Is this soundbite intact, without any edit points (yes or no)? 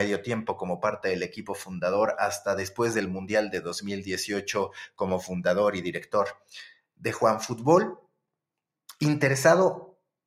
yes